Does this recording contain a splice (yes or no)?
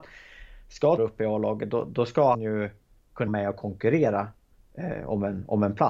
yes